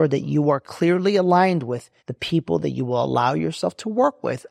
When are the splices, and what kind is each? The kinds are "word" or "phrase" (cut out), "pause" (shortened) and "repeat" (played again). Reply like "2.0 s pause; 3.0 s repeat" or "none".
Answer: 2.0 s pause